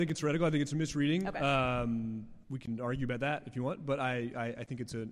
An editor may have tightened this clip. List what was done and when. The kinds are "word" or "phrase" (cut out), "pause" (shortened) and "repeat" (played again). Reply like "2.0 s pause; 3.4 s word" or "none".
2.4 s pause